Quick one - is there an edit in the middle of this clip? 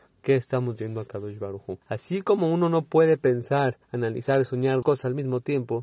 yes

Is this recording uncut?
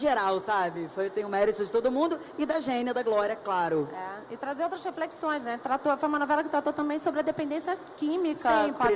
yes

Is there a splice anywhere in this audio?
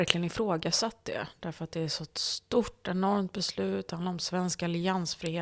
no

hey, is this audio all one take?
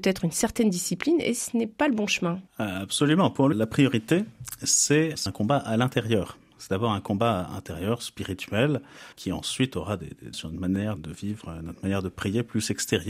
no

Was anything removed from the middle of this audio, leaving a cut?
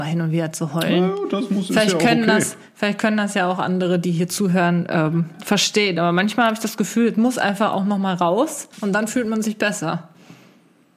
yes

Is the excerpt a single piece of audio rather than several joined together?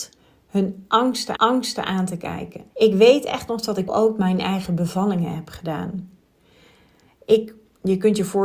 no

